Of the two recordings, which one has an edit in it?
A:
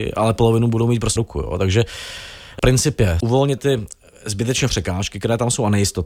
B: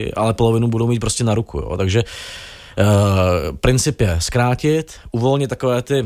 A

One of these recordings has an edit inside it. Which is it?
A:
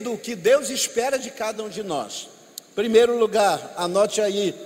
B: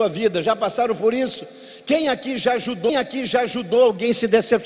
B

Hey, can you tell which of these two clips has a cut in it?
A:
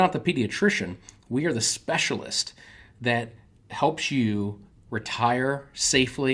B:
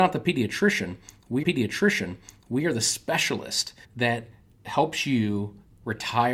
B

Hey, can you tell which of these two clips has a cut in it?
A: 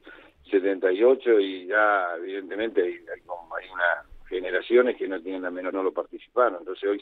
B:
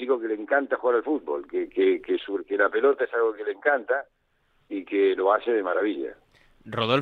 A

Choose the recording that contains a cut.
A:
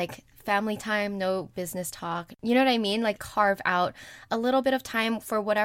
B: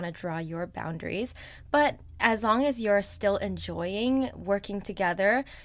A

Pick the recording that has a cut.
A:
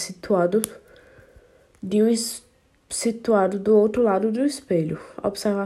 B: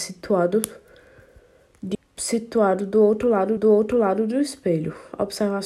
B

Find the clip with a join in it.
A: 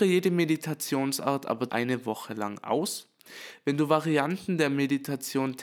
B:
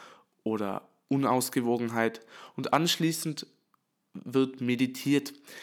A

